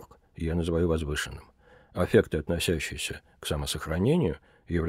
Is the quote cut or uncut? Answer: uncut